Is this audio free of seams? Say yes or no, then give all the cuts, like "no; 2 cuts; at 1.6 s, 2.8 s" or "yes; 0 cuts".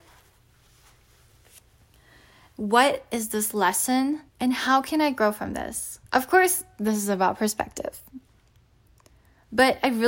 no; 2 cuts; at 4.3 s, 6.1 s